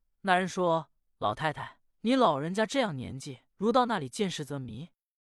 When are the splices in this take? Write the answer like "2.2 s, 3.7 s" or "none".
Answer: 1.0 s, 1.9 s, 3.5 s